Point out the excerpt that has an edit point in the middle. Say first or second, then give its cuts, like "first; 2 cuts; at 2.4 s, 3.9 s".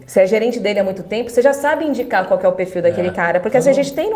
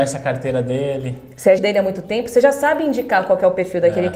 second; 1 cut; at 1.6 s